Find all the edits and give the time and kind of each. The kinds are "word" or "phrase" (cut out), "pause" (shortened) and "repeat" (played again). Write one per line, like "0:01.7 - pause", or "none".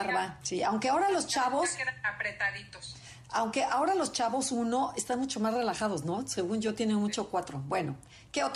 none